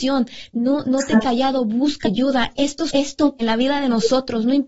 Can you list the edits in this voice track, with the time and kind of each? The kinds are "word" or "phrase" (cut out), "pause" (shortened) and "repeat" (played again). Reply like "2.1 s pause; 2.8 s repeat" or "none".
1.2 s word; 2.0 s word; 2.9 s word; 3.4 s word